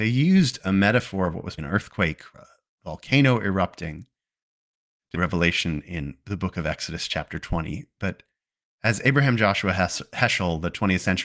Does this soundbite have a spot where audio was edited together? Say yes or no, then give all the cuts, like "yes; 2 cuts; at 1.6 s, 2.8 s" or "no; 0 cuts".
yes; 3 cuts; at 1.6 s, 2.3 s, 5.1 s